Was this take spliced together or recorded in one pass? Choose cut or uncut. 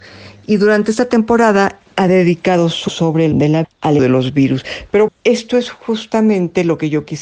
cut